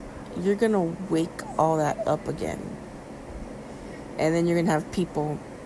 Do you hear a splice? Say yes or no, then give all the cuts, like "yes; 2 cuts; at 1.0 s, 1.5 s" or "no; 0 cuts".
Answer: no; 0 cuts